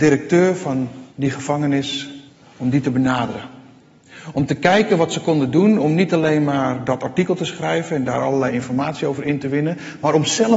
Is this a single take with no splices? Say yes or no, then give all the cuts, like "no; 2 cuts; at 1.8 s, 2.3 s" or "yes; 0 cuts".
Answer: no; 2 cuts; at 1.1 s, 2.3 s